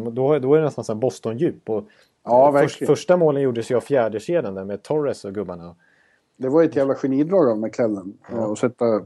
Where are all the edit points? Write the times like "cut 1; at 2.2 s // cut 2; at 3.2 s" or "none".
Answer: none